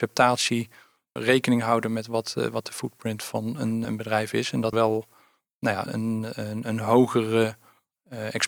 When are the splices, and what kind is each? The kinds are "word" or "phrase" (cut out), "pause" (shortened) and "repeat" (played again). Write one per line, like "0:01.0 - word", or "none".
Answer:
0:01.2 - word
0:03.8 - word
0:04.7 - word
0:05.9 - word